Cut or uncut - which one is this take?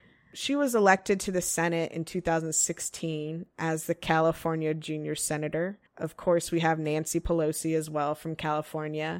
cut